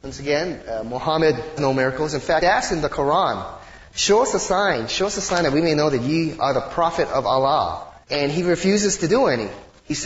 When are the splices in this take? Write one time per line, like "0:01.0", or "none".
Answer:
0:01.6
0:02.4
0:08.0